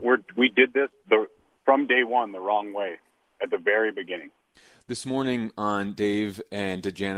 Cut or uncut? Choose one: uncut